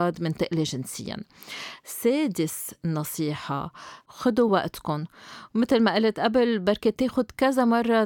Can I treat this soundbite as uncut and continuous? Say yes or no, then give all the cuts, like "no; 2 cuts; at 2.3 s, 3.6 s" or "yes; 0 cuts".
yes; 0 cuts